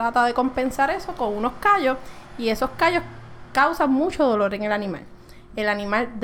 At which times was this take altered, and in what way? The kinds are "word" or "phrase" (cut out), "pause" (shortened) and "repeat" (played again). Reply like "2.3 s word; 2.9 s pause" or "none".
none